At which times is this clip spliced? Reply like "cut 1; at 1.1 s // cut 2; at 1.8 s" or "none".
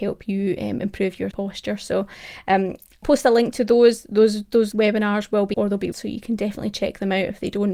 cut 1; at 1.3 s // cut 2; at 3.0 s // cut 3; at 4.7 s // cut 4; at 5.5 s // cut 5; at 5.9 s